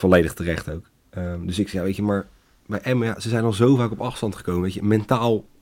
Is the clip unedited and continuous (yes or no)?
yes